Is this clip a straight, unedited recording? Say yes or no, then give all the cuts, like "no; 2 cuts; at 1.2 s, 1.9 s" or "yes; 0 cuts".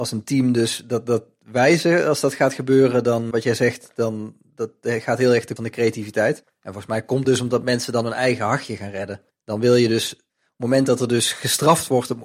no; 6 cuts; at 3.3 s, 5.6 s, 6.4 s, 7.2 s, 9.3 s, 10.3 s